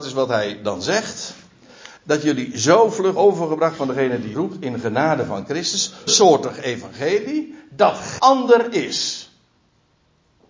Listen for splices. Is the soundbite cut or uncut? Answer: cut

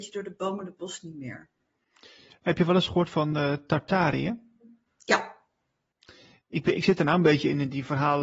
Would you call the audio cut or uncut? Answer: uncut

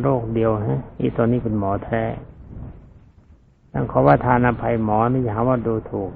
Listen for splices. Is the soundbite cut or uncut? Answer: uncut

